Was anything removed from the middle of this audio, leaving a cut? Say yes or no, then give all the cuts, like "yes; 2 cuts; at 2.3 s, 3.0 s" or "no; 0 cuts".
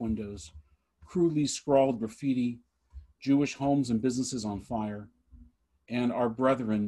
no; 0 cuts